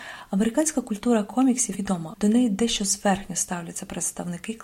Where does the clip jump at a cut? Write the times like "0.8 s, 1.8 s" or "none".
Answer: 1.7 s, 2.1 s